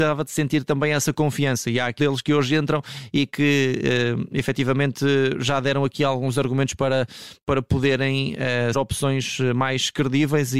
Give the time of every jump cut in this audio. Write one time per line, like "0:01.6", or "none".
0:02.0
0:08.7